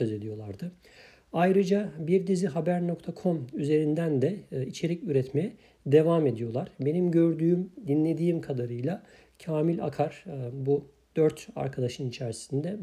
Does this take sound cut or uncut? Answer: uncut